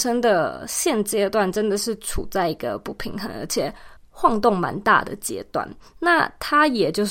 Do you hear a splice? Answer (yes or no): yes